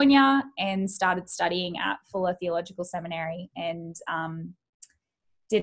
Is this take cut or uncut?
uncut